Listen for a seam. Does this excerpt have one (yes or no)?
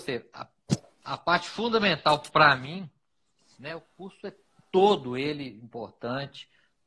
no